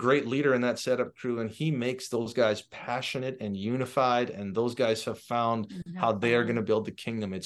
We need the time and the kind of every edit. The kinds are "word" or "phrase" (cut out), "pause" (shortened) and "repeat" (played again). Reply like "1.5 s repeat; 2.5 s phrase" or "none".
none